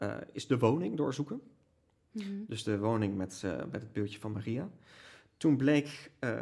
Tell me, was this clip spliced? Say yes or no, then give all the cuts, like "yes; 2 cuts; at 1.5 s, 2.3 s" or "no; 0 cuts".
no; 0 cuts